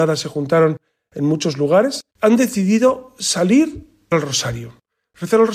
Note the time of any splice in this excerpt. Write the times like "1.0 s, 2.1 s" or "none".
2.1 s, 4.1 s

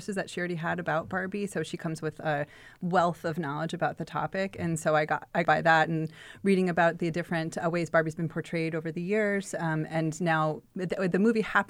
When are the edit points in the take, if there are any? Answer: 5.4 s

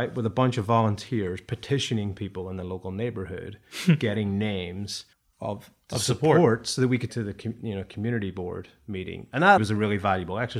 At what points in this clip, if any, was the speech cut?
5.1 s, 7.1 s, 9.6 s

